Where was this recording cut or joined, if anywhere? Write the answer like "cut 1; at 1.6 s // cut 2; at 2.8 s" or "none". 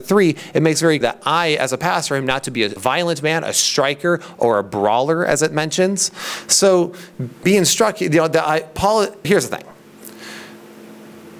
cut 1; at 1.0 s // cut 2; at 2.8 s // cut 3; at 7.4 s // cut 4; at 9.2 s